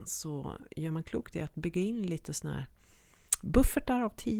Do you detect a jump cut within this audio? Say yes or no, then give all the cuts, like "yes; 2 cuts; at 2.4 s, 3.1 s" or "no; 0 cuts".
no; 0 cuts